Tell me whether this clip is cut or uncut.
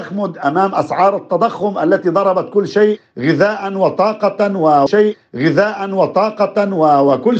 cut